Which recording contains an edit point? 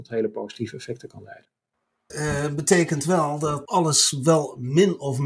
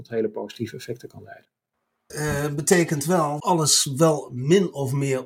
second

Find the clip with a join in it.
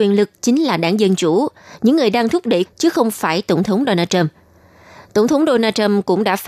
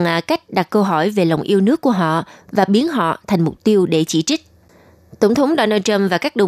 first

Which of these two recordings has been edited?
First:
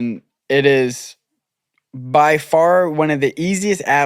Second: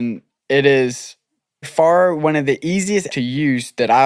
second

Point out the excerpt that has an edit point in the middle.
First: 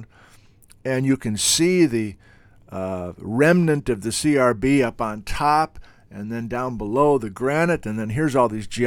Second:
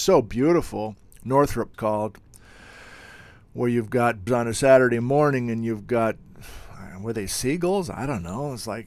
second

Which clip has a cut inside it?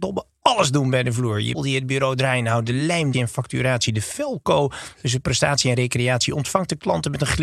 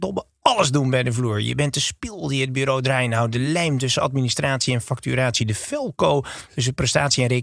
first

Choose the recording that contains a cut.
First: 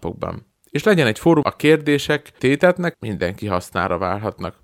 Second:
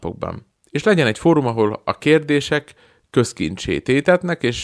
first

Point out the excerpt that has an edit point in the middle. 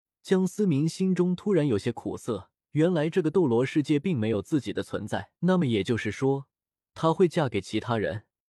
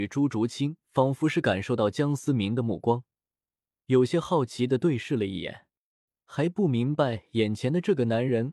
first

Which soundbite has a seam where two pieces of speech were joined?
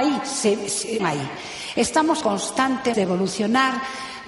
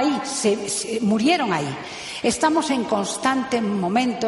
first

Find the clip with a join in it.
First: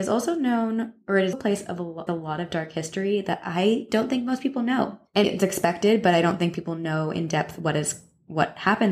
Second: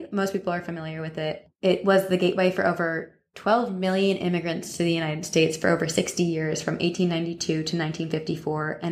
first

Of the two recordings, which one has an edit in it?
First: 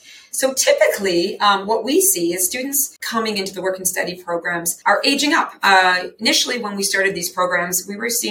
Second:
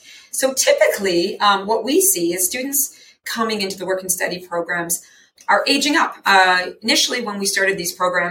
first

